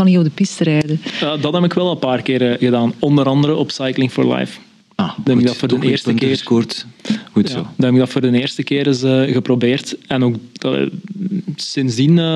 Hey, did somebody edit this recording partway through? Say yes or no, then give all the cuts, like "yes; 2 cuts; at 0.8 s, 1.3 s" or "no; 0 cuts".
no; 0 cuts